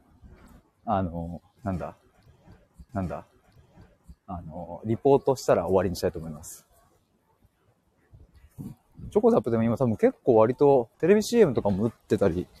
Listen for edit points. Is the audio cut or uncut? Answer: cut